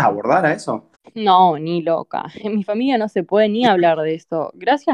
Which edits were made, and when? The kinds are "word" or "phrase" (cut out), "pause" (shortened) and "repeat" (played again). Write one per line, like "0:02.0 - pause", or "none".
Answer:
0:00.9 - pause